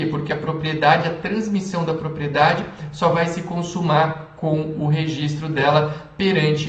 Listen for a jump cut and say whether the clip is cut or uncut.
uncut